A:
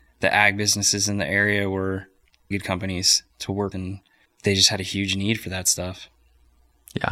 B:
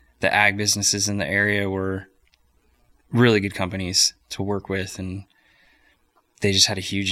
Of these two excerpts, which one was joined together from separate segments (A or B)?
A